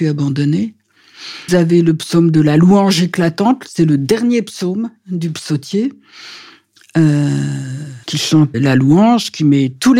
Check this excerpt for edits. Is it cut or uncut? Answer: cut